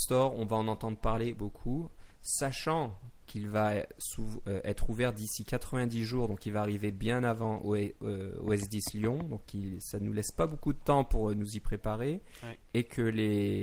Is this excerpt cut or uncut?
cut